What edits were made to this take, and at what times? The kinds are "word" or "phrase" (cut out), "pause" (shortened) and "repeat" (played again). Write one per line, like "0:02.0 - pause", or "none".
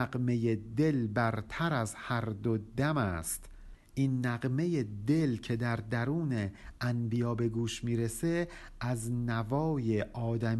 none